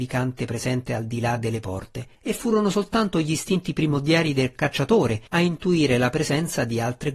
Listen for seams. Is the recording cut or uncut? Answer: cut